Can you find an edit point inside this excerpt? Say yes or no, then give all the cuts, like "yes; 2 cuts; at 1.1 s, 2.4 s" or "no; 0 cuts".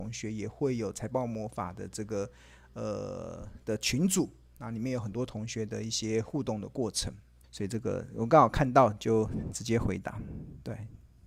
yes; 1 cut; at 7.4 s